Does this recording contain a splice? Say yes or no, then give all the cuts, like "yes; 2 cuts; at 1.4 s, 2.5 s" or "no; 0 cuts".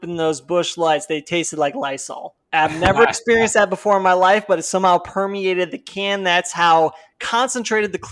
yes; 1 cut; at 2.4 s